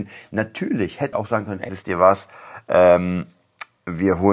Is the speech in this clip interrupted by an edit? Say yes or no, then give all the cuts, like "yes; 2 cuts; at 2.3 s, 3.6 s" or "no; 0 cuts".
yes; 2 cuts; at 1.1 s, 1.7 s